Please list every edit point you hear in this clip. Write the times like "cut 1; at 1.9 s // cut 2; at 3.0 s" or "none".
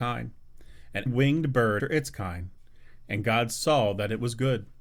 cut 1; at 1.1 s // cut 2; at 1.8 s